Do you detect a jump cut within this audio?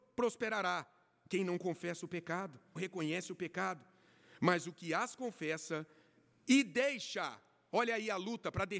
yes; 1 cut; at 2.8 s

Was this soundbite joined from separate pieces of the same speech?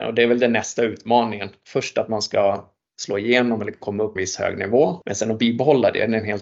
yes; 2 cuts; at 4.2 s, 5.0 s

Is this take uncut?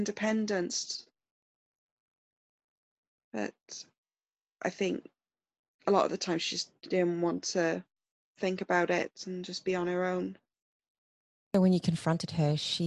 yes; 0 cuts

